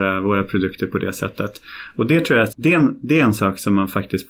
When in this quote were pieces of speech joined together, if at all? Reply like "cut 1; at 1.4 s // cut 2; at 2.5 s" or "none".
cut 1; at 2.5 s